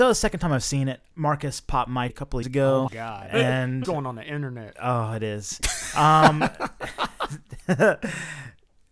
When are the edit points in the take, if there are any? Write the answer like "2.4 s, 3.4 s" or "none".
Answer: 1.1 s, 2.1 s, 2.4 s, 2.9 s, 3.8 s